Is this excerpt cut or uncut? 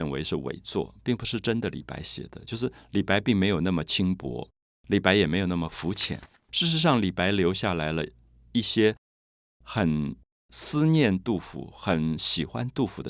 uncut